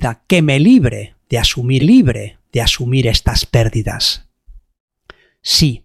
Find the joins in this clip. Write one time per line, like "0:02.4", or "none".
0:01.8